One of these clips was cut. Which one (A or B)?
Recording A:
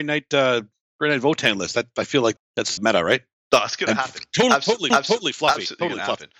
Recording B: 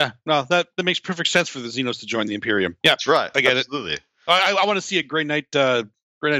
A